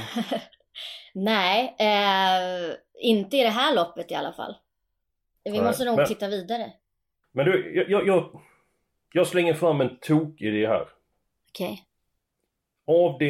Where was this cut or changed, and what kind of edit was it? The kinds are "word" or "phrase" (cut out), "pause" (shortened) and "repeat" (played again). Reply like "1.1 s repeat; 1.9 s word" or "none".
none